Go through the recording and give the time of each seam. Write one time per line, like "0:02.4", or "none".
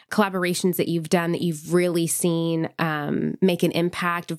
none

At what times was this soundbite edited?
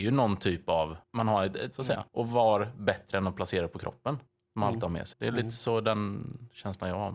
0:01.0
0:01.7
0:02.1
0:04.3
0:05.1

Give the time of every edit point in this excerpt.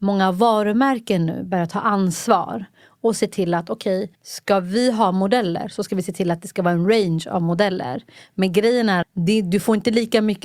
0:04.1
0:09.0

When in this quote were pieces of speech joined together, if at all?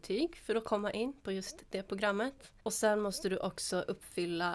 0:02.6

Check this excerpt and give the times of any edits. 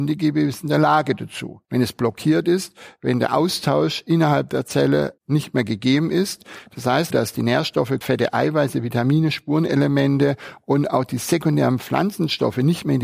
0:01.6
0:05.2
0:07.1
0:08.0

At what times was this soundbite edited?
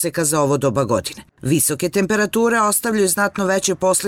0:01.3

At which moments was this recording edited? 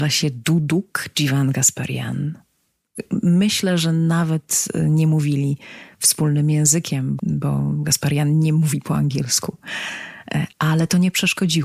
0:07.2
0:10.5

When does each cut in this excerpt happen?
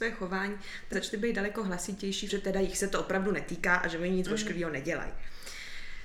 0:00.9
0:02.3

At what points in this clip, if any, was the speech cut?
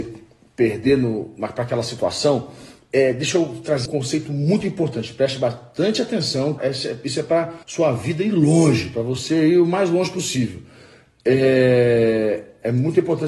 0:03.9
0:06.6
0:07.6

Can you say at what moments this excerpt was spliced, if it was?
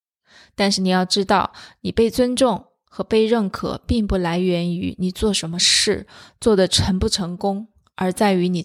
none

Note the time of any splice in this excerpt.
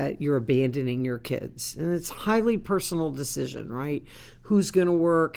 none

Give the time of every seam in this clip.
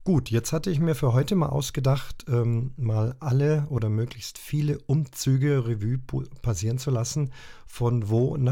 none

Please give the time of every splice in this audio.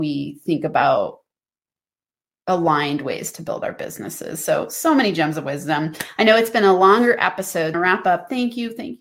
0:07.7

